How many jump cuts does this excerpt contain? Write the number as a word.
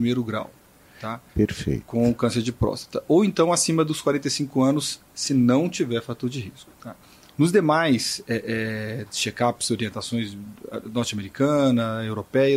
two